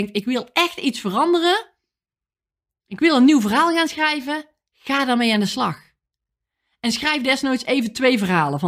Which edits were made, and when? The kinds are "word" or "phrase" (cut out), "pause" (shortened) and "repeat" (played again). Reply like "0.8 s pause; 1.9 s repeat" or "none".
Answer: none